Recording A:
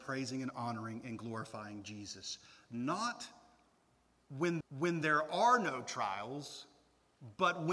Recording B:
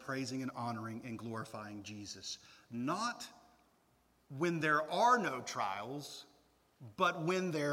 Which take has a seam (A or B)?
A